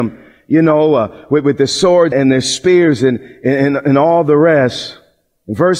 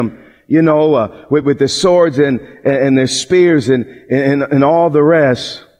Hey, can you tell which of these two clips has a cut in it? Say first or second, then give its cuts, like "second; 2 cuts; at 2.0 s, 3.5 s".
first; 1 cut; at 2.1 s